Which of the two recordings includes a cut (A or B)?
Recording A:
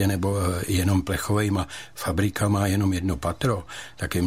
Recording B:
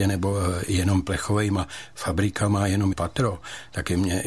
B